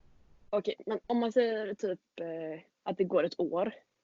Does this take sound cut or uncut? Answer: cut